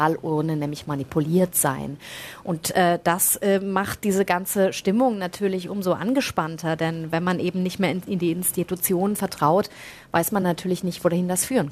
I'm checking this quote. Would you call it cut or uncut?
uncut